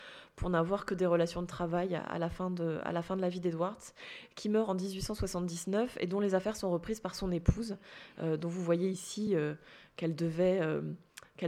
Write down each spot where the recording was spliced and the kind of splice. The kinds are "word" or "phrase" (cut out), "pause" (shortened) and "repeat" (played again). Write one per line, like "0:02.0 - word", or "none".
none

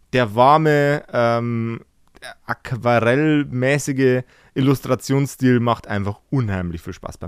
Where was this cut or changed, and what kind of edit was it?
none

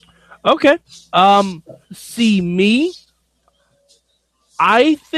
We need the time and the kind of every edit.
0:01.8 - pause

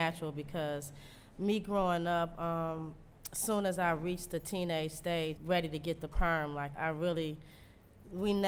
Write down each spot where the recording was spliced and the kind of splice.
0:05.4 - phrase
0:06.7 - word

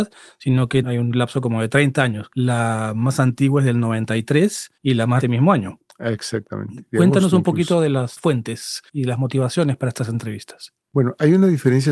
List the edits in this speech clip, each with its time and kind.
0:04.8 - pause
0:05.2 - phrase
0:08.9 - pause
0:10.8 - pause

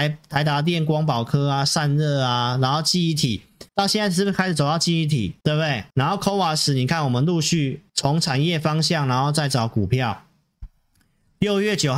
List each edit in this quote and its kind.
0:03.7 - pause
0:05.4 - pause
0:05.9 - pause
0:07.9 - pause

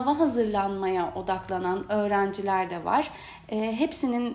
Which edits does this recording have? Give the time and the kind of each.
none

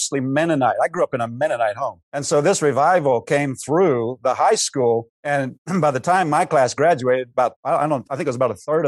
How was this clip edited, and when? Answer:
0:02.0 - pause
0:05.1 - pause

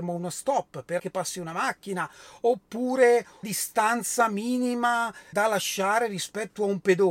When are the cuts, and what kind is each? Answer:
0:01.0 - word
0:03.4 - word
0:05.3 - word

